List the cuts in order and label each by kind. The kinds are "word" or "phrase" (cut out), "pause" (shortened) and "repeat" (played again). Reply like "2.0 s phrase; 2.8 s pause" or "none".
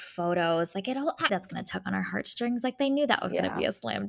1.3 s word